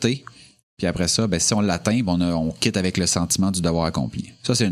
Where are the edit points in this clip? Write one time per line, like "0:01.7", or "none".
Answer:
none